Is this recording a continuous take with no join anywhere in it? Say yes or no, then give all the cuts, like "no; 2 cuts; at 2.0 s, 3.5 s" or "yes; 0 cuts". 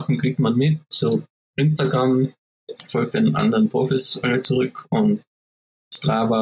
yes; 0 cuts